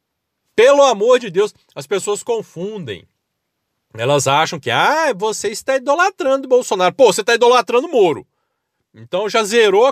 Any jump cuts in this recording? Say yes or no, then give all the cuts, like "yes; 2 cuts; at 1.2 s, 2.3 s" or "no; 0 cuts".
no; 0 cuts